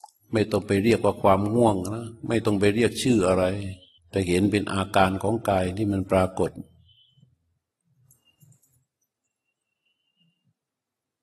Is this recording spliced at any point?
yes; 1 cut; at 4.0 s

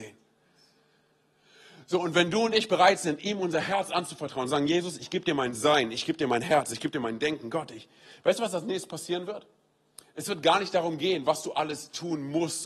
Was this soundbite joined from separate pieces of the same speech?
no; 0 cuts

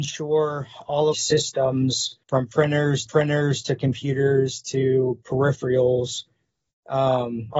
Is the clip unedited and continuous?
no; 3 cuts; at 1.1 s, 2.2 s, 3.1 s

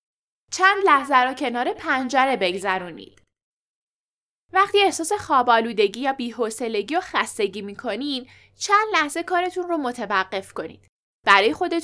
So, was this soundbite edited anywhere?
no; 0 cuts

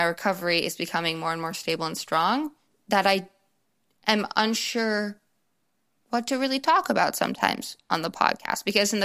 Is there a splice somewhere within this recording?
no; 0 cuts

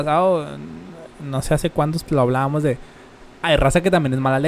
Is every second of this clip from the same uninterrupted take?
no; 1 cut; at 2.1 s

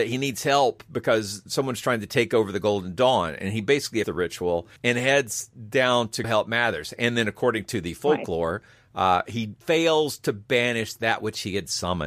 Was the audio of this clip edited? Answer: yes; 4 cuts; at 4.0 s, 4.8 s, 6.2 s, 9.6 s

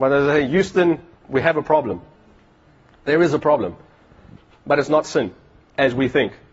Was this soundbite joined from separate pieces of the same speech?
no; 0 cuts

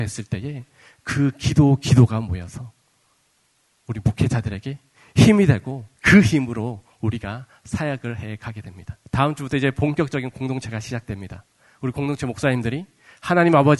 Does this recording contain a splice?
yes; 3 cuts; at 3.5 s, 5.9 s, 9.0 s

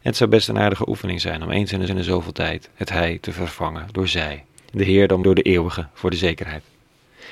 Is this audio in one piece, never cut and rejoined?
no; 3 cuts; at 1.9 s, 4.5 s, 5.2 s

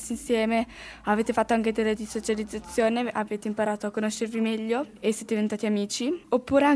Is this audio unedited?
no; 1 cut; at 1.9 s

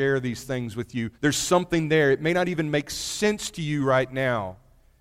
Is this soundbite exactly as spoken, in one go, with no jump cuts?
no; 1 cut; at 1.1 s

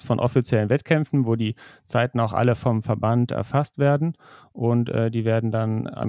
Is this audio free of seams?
yes; 0 cuts

